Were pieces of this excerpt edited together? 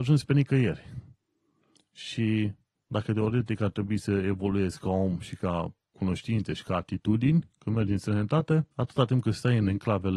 yes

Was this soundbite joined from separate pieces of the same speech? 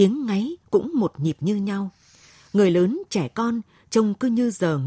no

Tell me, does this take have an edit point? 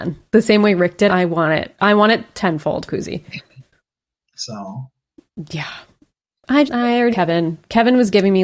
yes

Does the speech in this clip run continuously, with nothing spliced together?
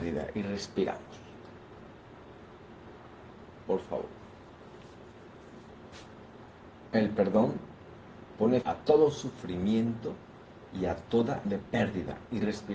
no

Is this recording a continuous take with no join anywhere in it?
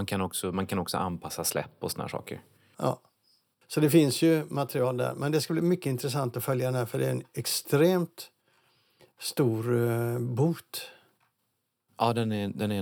yes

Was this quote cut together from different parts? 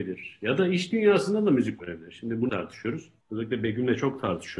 yes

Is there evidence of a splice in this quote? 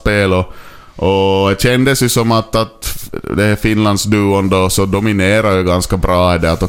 no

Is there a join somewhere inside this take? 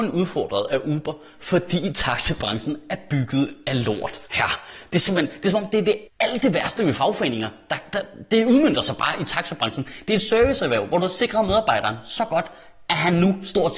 yes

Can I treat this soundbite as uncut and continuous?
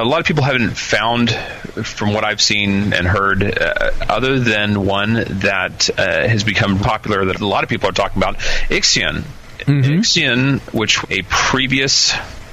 no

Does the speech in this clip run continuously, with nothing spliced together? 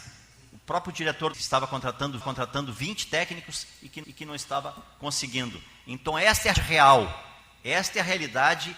no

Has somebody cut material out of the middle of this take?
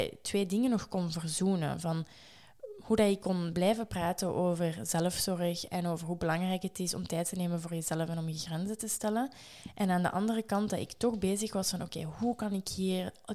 no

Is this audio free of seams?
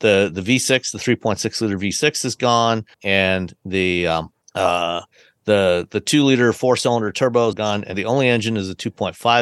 no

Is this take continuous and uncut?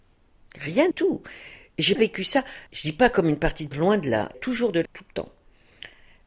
no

